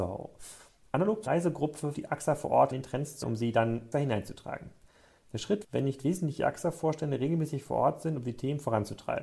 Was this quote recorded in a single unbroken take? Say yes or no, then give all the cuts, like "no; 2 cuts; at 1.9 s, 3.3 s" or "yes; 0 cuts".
no; 6 cuts; at 1.3 s, 1.9 s, 2.7 s, 3.2 s, 3.9 s, 5.6 s